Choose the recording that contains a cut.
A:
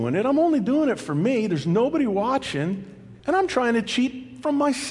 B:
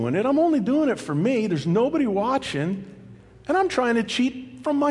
A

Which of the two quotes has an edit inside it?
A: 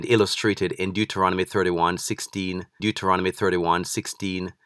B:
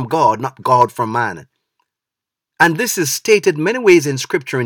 A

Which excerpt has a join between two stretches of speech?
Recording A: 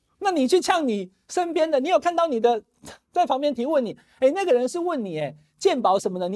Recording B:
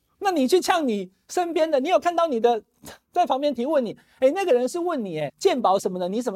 B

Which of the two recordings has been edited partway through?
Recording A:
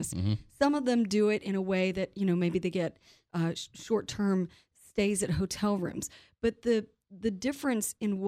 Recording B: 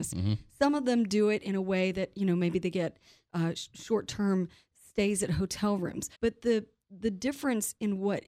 B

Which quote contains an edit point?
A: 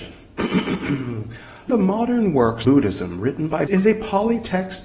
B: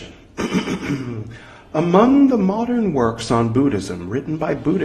A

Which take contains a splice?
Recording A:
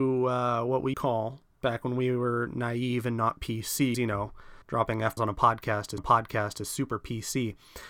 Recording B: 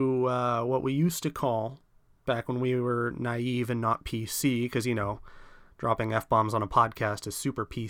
A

